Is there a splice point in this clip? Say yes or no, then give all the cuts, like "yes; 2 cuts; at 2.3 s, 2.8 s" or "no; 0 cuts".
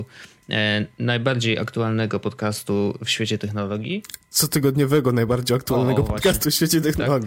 no; 0 cuts